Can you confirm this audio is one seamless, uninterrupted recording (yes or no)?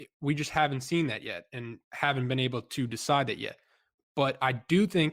no